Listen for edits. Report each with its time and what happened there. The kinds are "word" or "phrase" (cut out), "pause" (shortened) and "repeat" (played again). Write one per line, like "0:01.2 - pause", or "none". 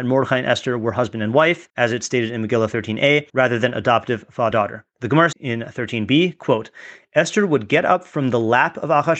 0:01.7 - pause
0:03.3 - pause
0:04.5 - word
0:05.3 - word